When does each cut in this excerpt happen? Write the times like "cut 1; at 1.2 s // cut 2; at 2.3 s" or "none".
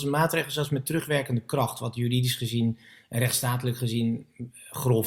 none